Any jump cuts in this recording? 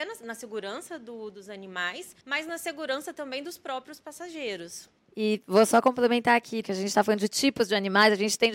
yes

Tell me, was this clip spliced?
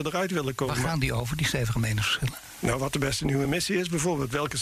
no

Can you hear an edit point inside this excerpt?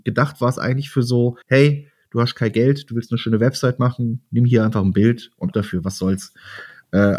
yes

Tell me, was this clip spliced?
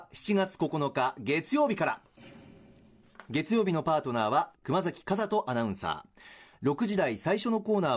yes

